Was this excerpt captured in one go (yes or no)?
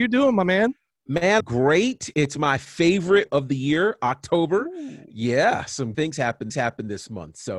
no